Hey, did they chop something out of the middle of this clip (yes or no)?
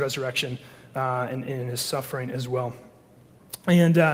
no